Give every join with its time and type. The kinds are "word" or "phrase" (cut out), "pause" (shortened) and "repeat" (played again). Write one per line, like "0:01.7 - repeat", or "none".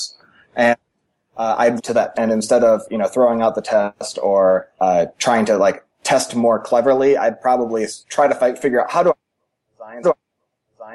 0:01.8 - phrase
0:02.1 - phrase
0:04.8 - word
0:08.0 - pause
0:10.0 - repeat